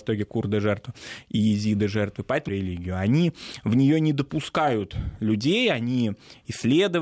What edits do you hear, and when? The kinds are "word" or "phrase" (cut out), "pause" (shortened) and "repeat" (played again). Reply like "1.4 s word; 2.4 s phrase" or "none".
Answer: 2.5 s phrase